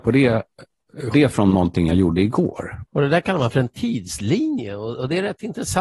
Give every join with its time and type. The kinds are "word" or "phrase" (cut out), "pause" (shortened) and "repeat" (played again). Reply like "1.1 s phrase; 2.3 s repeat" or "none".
1.1 s word; 2.9 s pause